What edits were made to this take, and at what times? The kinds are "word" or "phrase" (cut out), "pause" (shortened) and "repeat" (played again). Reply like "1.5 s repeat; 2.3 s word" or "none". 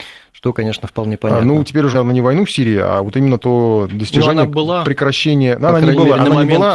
1.9 s phrase